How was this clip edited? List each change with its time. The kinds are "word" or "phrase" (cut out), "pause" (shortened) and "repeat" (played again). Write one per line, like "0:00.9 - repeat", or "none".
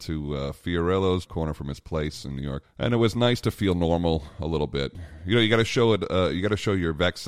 0:01.3 - phrase
0:02.6 - word